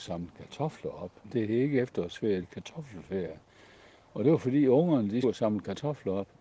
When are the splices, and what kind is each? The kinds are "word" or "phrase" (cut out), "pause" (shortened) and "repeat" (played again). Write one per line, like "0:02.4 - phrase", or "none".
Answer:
0:02.4 - word
0:05.2 - word